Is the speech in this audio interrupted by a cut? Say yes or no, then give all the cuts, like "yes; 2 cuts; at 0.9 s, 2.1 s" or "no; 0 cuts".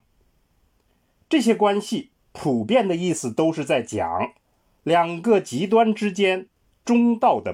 no; 0 cuts